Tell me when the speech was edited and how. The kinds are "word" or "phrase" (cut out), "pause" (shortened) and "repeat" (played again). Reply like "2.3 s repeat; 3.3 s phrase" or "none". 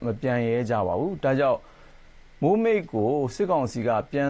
none